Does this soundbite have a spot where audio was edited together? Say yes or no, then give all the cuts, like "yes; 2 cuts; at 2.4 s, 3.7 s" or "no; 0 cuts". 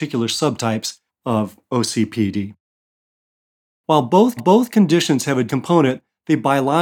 yes; 3 cuts; at 1.1 s, 4.4 s, 5.5 s